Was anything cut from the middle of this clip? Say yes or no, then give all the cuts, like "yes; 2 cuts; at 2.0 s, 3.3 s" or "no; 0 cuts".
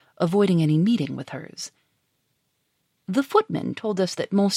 no; 0 cuts